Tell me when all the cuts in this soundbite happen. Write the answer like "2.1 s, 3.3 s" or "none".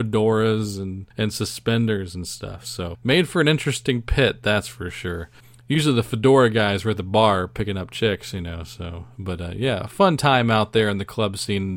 1.1 s, 2.9 s, 5.4 s